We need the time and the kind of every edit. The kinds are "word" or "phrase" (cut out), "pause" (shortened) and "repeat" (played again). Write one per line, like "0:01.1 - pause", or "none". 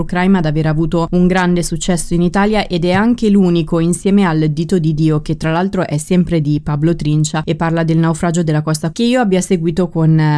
0:08.9 - word